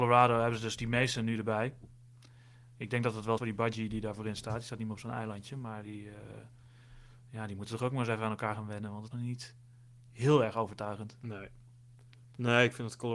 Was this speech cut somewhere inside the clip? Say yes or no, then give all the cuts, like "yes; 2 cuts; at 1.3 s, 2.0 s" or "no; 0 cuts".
yes; 2 cuts; at 3.4 s, 9.1 s